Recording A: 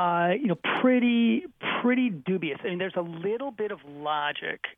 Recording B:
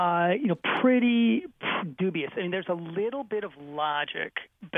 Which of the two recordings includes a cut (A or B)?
B